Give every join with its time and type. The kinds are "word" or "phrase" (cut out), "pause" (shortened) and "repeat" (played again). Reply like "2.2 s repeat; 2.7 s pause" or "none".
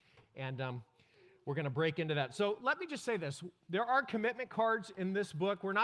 none